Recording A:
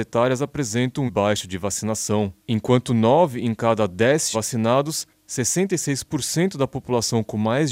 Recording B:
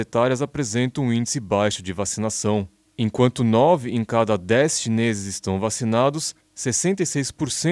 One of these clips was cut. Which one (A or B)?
A